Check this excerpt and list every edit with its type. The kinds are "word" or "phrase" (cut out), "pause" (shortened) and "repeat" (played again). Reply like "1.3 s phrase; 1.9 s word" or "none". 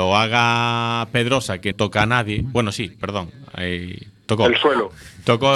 1.7 s word